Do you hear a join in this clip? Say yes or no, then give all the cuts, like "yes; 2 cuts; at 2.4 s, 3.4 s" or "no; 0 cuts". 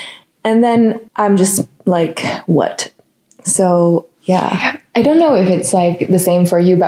yes; 1 cut; at 1.1 s